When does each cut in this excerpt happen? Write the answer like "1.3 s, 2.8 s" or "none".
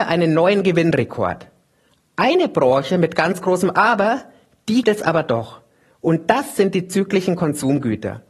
4.8 s